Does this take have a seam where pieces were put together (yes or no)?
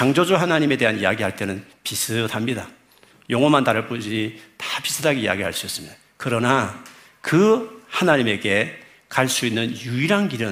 no